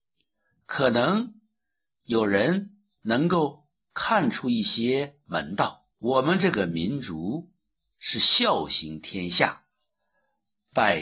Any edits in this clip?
yes; 1 cut; at 5.9 s

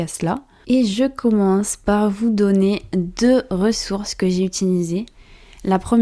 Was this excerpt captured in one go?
yes; 0 cuts

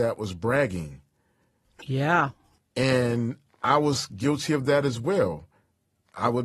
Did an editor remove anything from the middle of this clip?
no; 0 cuts

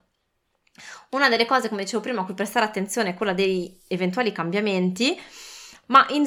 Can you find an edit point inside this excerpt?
no; 0 cuts

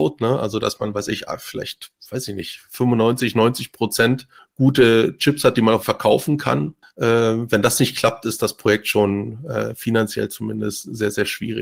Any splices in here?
yes; 3 cuts; at 4.4 s, 5.8 s, 6.8 s

